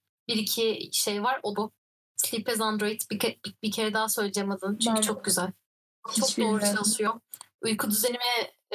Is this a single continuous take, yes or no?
no